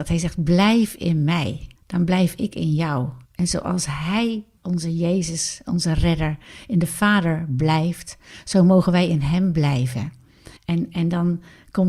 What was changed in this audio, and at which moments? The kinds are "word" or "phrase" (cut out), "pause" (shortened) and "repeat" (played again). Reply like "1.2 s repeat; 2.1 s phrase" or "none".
1.8 s pause; 3.2 s pause; 4.6 s word; 10.6 s pause